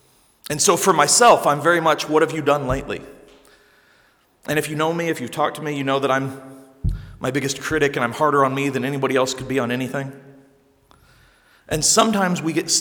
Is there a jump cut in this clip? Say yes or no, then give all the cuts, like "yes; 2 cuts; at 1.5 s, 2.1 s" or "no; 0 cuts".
no; 0 cuts